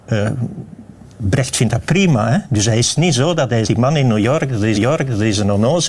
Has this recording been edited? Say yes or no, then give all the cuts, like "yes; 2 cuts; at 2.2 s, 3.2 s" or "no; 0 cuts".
yes; 3 cuts; at 1.1 s, 3.6 s, 4.7 s